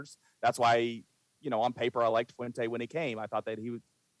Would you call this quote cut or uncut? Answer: uncut